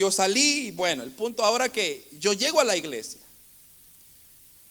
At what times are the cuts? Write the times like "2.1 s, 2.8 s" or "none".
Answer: none